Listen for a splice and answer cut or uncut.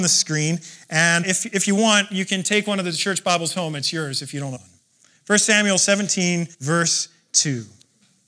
cut